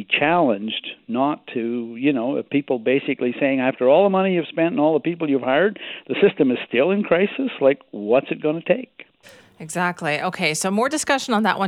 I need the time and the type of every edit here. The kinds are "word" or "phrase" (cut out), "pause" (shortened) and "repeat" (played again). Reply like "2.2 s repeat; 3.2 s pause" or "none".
none